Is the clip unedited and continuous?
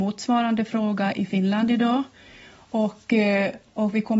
yes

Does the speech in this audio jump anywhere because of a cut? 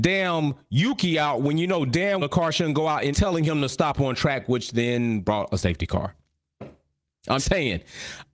yes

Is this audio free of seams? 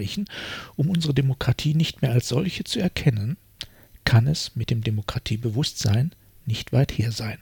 yes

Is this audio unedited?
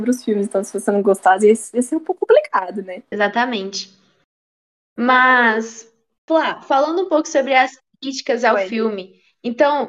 yes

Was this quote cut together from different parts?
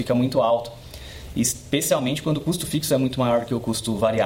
no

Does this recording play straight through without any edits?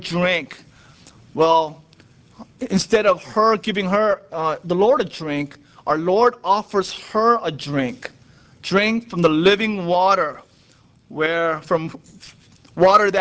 yes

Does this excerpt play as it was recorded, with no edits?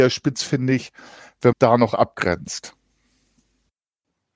no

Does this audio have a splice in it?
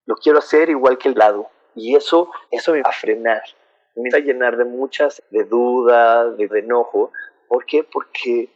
yes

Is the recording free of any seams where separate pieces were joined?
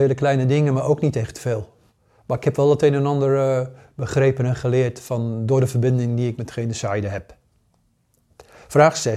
yes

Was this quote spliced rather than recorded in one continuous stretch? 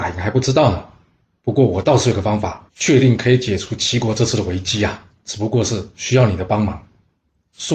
yes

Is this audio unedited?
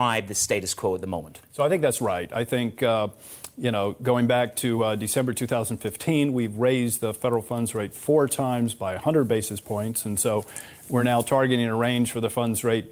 yes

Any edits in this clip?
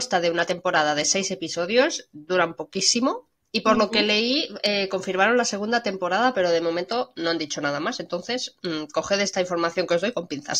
no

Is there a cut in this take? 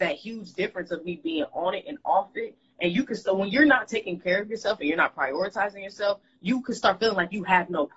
no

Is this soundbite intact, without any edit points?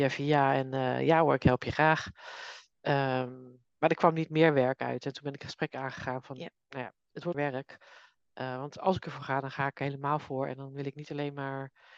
no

